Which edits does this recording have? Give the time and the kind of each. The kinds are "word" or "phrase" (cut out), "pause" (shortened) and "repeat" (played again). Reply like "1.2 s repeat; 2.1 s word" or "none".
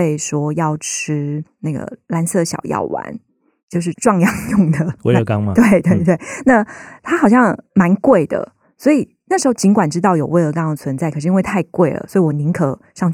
none